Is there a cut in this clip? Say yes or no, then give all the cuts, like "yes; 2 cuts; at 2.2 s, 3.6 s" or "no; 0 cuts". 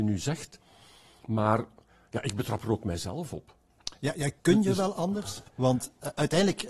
yes; 2 cuts; at 4.4 s, 5.5 s